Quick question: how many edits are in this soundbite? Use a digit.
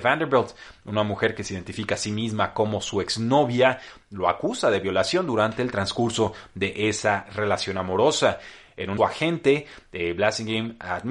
1